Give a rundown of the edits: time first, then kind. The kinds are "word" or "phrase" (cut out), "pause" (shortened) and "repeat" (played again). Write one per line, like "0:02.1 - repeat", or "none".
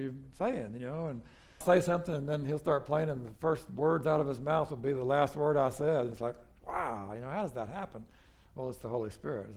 0:01.6 - phrase